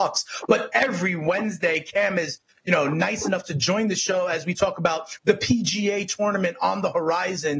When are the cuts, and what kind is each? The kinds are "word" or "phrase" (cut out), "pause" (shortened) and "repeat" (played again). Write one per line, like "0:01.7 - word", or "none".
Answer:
none